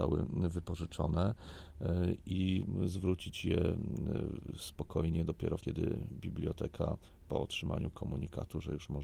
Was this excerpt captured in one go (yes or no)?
no